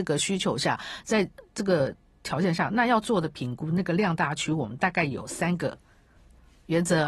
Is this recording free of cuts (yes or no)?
yes